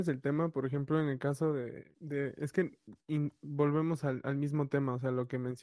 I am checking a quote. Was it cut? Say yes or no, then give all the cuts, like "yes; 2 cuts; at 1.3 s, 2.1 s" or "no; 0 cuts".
no; 0 cuts